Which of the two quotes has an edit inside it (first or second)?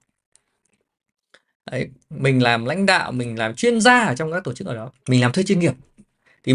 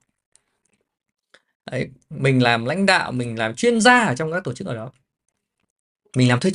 first